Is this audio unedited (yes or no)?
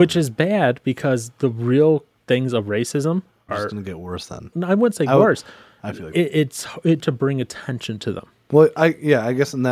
no